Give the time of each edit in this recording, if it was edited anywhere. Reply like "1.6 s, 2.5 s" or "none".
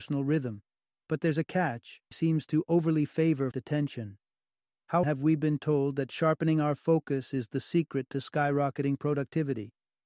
2.1 s, 3.5 s, 5.0 s